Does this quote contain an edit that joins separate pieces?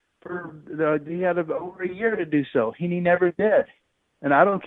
no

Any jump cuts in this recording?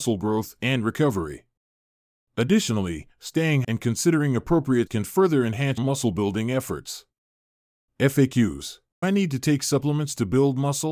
yes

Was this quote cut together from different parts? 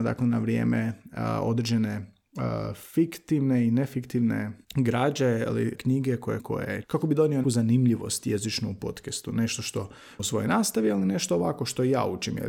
yes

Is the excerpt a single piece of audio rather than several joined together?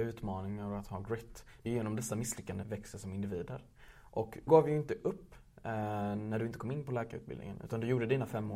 no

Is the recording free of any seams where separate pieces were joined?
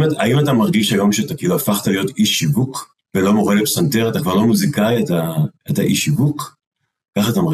no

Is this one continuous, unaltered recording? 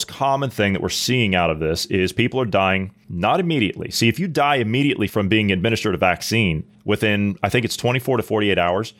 yes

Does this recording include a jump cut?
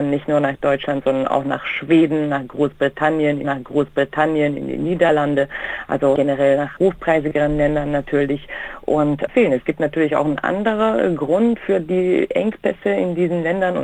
yes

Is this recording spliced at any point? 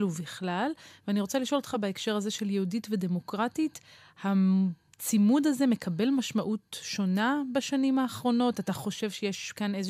no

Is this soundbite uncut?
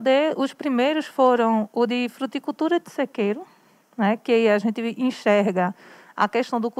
yes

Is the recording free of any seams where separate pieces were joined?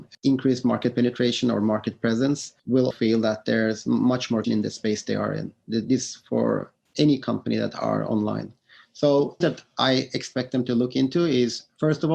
no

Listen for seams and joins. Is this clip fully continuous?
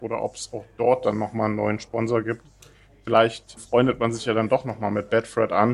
no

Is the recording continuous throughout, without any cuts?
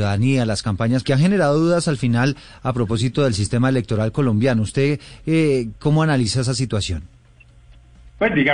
no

